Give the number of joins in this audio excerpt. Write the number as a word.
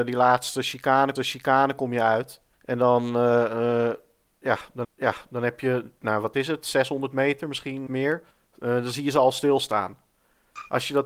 five